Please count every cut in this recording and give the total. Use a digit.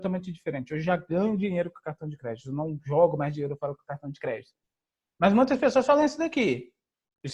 0